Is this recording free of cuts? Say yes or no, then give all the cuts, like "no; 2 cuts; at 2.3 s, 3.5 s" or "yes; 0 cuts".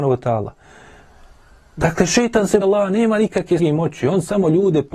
no; 2 cuts; at 2.6 s, 3.6 s